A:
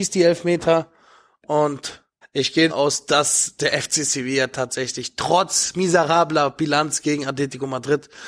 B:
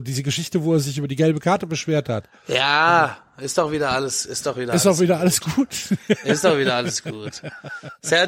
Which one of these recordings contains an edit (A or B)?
A